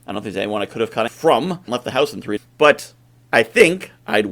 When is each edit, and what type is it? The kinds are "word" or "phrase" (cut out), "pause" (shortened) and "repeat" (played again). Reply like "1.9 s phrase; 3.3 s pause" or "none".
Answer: 1.1 s word; 1.7 s word; 2.4 s word